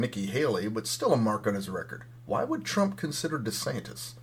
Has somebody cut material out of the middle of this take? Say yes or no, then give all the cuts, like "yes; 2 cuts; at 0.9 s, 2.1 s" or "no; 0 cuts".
no; 0 cuts